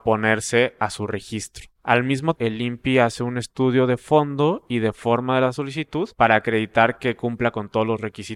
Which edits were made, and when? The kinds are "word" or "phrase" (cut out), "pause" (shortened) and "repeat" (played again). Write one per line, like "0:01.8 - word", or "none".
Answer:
0:01.7 - pause
0:02.3 - word
0:06.1 - pause